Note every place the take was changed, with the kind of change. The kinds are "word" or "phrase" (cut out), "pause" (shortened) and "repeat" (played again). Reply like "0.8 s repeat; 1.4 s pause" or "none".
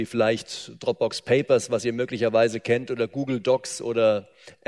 none